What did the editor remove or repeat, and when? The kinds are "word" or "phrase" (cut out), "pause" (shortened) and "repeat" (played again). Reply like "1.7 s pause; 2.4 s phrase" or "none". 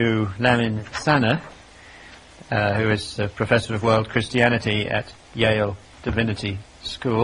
none